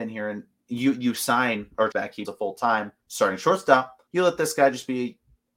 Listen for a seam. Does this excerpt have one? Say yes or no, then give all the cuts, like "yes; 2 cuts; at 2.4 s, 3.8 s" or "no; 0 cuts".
yes; 4 cuts; at 1.9 s, 2.2 s, 3.0 s, 4.1 s